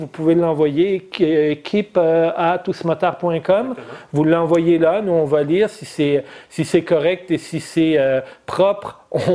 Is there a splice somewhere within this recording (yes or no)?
no